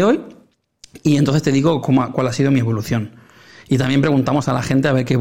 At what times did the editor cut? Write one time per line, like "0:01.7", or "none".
none